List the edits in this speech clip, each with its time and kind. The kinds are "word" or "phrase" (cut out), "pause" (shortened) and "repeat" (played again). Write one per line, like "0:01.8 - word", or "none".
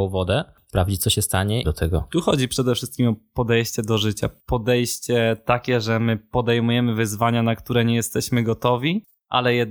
0:01.6 - phrase
0:04.4 - pause